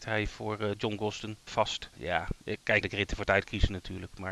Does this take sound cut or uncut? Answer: cut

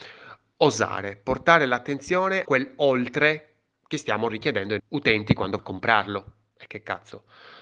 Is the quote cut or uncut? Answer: cut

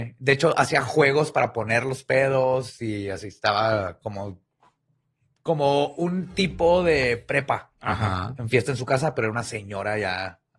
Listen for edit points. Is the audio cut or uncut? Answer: uncut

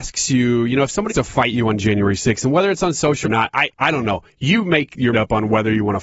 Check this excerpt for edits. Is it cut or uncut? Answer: cut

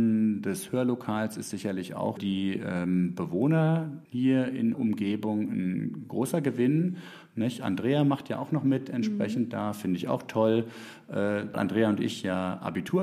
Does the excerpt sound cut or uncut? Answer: cut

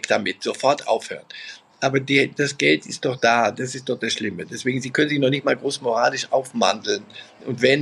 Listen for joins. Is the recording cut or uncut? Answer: uncut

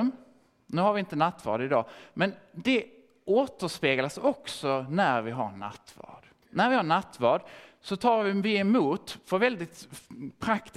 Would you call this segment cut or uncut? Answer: cut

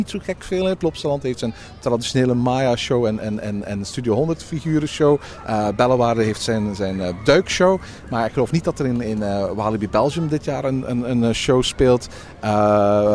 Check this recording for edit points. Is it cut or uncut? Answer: uncut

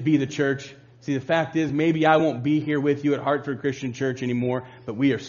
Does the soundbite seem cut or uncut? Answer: uncut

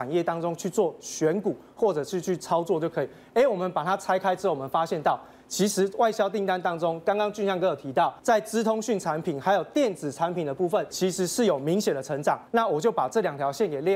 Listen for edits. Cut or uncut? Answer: cut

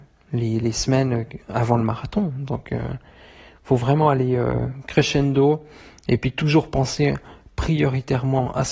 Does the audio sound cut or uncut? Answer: uncut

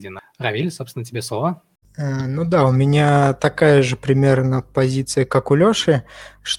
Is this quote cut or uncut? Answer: uncut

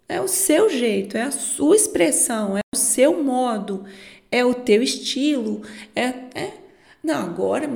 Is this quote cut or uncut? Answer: uncut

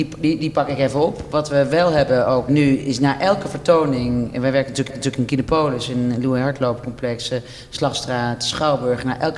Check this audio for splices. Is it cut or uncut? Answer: cut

